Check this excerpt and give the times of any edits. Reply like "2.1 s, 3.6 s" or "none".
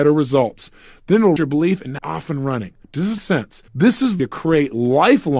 1.4 s, 2.0 s, 2.8 s, 3.2 s, 3.7 s, 4.2 s

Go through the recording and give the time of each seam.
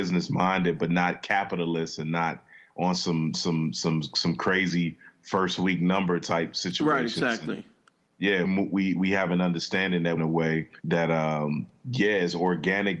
3.3 s, 8.4 s, 10.2 s, 10.8 s

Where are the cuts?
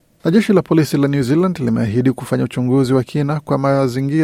none

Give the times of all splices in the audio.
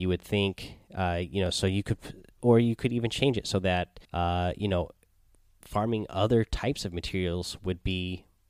2.3 s, 4.0 s

